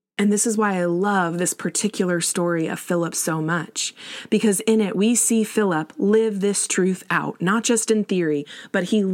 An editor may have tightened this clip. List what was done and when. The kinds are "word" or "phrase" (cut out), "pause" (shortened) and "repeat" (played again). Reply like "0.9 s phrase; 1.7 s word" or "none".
none